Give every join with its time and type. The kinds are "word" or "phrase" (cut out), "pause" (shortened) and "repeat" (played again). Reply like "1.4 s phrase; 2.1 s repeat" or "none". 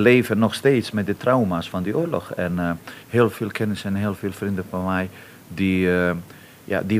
3.0 s pause

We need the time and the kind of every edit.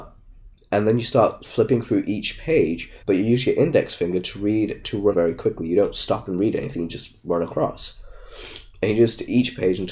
3.0 s pause; 4.8 s word; 5.1 s phrase

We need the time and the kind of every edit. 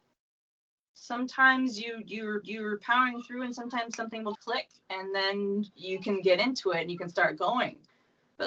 2.4 s repeat; 4.3 s word; 5.7 s pause

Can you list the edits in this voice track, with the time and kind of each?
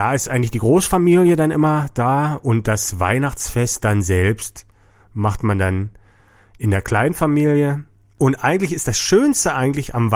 none

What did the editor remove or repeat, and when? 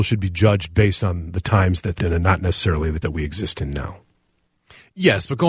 2.0 s word; 3.0 s word

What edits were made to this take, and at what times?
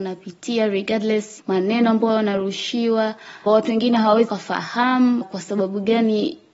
1.4 s word; 3.5 s word; 4.3 s word; 5.2 s word

